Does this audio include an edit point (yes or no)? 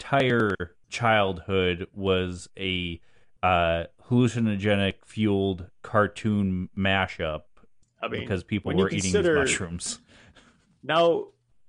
no